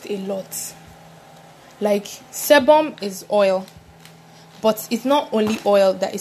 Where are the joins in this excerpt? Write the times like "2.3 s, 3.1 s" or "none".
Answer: none

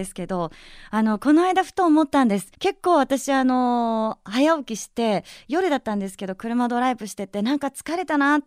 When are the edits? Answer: 2.5 s

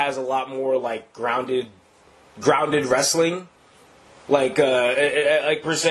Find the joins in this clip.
none

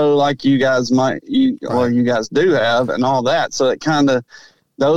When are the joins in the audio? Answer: none

